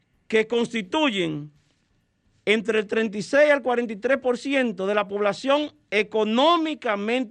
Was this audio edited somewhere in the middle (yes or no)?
no